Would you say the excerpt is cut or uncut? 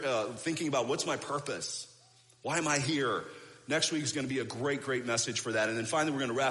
uncut